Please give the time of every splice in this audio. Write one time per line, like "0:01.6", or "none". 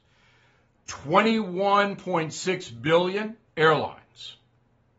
0:03.5